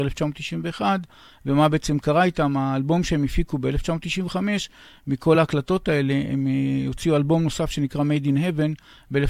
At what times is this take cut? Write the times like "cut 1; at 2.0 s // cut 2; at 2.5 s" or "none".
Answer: none